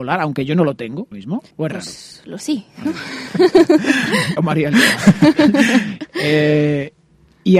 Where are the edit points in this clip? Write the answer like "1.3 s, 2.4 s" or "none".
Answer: 1.1 s, 1.5 s, 2.4 s, 4.4 s